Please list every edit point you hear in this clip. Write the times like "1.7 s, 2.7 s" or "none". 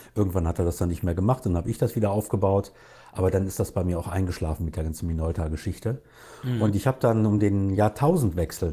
none